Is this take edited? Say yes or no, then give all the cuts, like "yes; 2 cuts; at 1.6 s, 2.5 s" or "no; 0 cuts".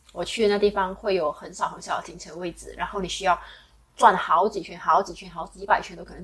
no; 0 cuts